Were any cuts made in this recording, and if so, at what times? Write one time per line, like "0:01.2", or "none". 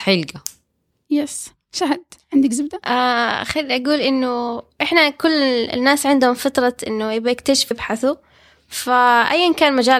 0:07.7